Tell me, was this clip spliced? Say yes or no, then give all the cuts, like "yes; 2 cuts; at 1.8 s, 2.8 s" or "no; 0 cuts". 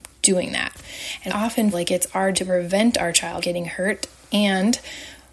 yes; 4 cuts; at 1.3 s, 1.7 s, 2.3 s, 3.4 s